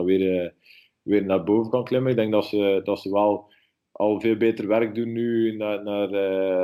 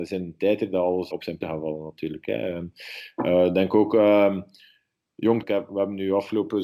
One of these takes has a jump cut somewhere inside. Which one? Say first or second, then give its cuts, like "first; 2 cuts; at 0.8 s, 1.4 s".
second; 3 cuts; at 1.1 s, 1.4 s, 5.4 s